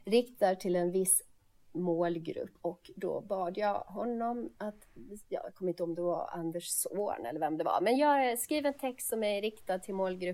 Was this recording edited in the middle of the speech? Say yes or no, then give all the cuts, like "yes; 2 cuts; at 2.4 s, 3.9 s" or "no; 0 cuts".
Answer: yes; 2 cuts; at 2.6 s, 4.6 s